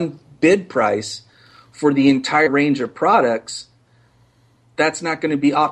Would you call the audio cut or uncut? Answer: uncut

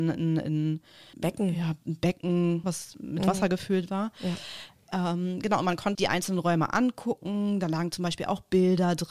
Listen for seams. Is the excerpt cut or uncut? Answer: cut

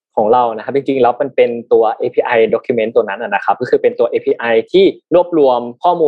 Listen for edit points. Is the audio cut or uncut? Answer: uncut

